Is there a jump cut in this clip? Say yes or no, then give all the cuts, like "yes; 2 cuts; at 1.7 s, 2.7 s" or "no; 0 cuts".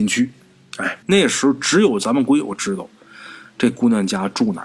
yes; 1 cut; at 1.0 s